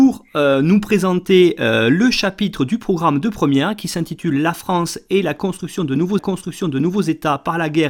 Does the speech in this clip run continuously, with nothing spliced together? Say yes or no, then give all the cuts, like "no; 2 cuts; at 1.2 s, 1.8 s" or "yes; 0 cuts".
no; 1 cut; at 6.2 s